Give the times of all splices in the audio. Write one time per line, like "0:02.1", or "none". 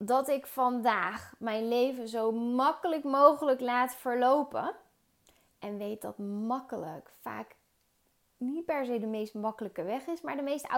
none